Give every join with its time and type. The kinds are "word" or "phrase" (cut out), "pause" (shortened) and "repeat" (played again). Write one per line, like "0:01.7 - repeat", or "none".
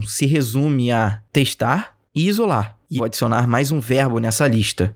0:02.1 - word
0:03.0 - word

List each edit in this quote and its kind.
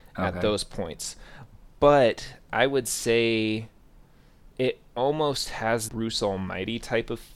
0:04.5 - pause
0:05.9 - word

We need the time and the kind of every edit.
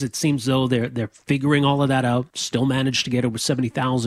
0:02.3 - pause

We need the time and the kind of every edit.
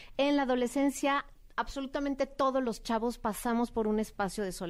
none

